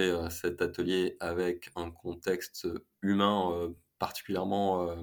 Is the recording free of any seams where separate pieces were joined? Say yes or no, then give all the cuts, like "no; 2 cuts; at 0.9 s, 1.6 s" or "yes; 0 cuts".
yes; 0 cuts